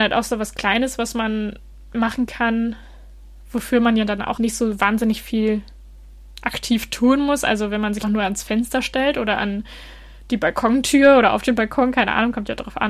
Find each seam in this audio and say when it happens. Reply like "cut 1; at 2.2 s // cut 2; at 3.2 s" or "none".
cut 1; at 4.4 s // cut 2; at 8.0 s